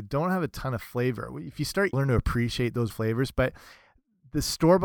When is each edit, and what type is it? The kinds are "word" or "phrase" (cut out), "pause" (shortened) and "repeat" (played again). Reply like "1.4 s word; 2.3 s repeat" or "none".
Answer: 1.9 s phrase; 2.9 s word